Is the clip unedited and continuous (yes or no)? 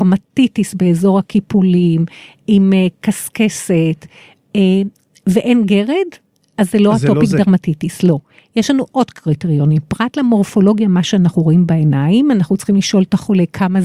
yes